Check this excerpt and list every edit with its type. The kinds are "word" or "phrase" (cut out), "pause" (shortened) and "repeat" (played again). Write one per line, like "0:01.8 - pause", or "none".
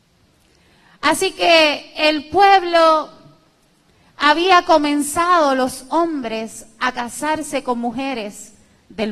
none